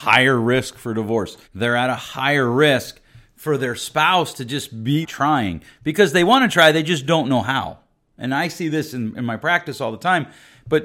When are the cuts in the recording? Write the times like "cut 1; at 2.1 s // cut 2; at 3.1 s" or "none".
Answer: cut 1; at 1.4 s // cut 2; at 5.0 s